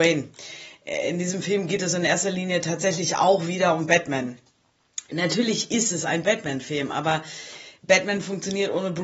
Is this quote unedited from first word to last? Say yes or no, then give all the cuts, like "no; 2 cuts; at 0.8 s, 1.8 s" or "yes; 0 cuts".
yes; 0 cuts